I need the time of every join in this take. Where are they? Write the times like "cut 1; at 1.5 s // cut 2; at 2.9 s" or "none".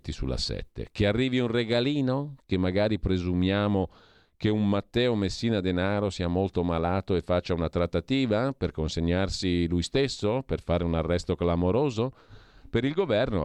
none